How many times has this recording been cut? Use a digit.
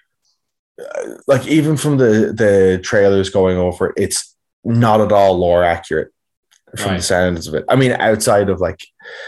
1